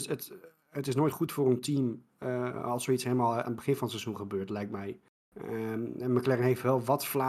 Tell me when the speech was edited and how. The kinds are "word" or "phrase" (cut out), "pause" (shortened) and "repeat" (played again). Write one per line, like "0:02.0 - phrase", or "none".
none